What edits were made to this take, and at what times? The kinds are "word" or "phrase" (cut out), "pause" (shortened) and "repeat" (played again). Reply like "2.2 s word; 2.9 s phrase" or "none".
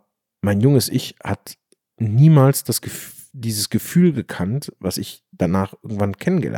none